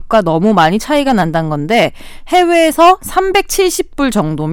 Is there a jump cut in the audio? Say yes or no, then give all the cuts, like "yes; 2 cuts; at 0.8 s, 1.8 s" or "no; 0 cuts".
no; 0 cuts